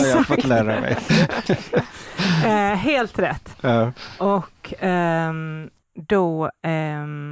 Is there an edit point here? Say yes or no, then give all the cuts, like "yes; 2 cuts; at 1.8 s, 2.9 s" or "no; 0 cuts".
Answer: no; 0 cuts